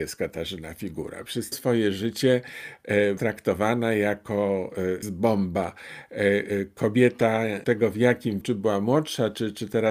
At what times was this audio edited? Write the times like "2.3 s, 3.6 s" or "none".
1.5 s, 3.2 s, 5.0 s, 7.6 s, 8.4 s